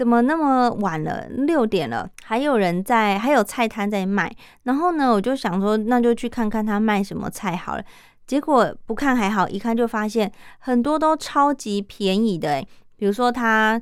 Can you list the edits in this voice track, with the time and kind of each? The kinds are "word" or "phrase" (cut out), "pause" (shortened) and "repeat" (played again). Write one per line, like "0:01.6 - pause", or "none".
0:02.1 - pause

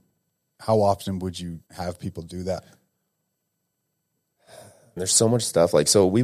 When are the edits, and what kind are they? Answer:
0:01.7 - pause
0:05.0 - word

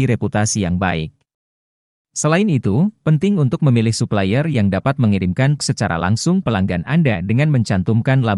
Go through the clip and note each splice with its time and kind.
0:05.6 - word
0:06.4 - word

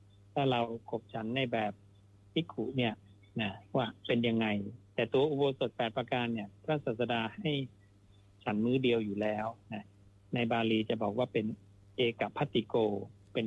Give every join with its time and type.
none

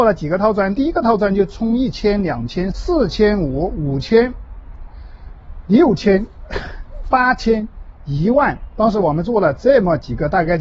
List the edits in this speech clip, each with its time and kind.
0:02.7 - phrase

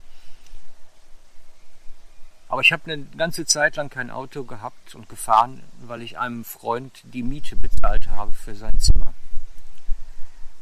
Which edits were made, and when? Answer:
none

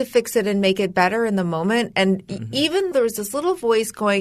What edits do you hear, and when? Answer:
0:02.9 - word

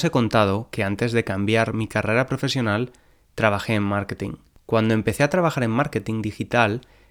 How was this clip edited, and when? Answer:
0:04.5 - pause

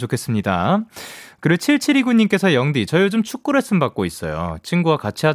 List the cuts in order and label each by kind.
none

